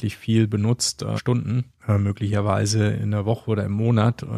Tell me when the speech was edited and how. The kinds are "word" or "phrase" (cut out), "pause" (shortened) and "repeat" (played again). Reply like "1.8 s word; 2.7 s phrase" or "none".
1.2 s word; 1.8 s pause